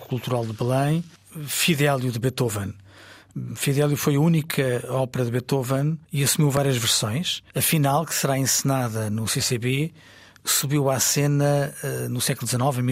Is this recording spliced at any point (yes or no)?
yes